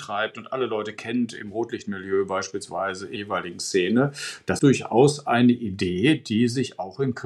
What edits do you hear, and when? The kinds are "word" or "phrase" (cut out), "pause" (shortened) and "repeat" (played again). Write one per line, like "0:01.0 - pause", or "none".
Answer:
0:03.2 - word
0:04.6 - word